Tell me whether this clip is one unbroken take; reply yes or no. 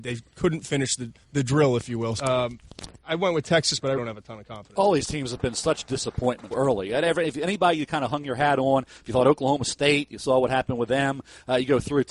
no